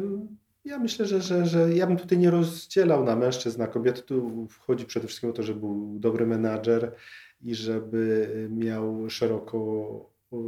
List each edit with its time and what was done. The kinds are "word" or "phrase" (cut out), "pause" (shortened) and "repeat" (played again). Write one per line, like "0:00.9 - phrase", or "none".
none